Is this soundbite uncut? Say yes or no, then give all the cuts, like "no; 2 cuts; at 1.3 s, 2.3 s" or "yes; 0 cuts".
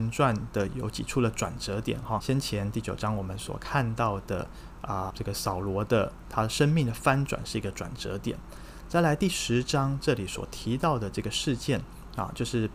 no; 2 cuts; at 2.2 s, 5.1 s